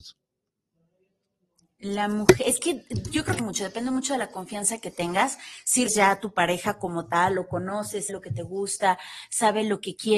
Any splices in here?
yes; 3 cuts; at 3.4 s, 5.9 s, 8.1 s

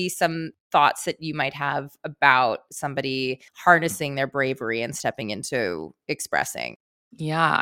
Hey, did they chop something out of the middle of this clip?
yes; 2 cuts; at 3.5 s, 6.0 s

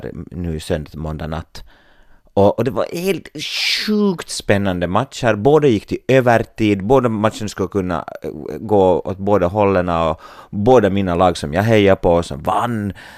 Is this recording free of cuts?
yes; 0 cuts

